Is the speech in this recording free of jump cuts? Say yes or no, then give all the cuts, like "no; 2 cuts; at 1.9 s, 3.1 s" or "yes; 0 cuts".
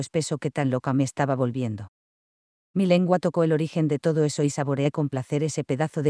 yes; 0 cuts